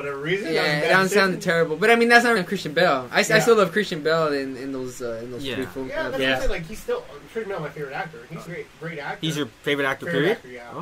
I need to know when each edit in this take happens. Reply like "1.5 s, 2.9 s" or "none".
2.4 s, 8.5 s, 9.6 s